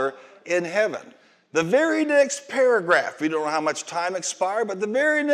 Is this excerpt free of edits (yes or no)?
yes